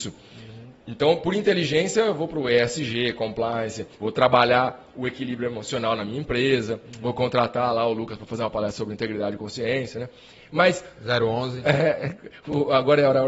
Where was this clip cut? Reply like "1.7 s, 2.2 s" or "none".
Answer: 3.9 s